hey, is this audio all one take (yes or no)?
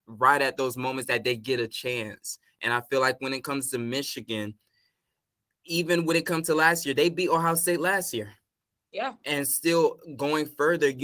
yes